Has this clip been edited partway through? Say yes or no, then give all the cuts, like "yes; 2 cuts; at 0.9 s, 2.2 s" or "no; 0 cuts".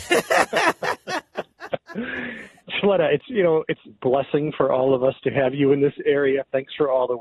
yes; 2 cuts; at 2.6 s, 3.9 s